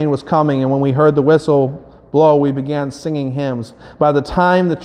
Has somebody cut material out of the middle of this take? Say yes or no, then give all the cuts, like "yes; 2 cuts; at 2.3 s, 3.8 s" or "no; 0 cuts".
no; 0 cuts